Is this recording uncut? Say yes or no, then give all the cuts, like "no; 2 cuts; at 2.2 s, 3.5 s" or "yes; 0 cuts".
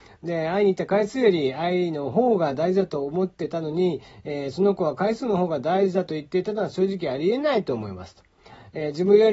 yes; 0 cuts